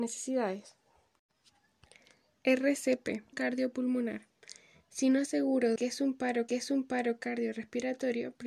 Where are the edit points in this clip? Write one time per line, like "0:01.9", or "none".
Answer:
0:03.3
0:04.6
0:05.3
0:05.8
0:06.5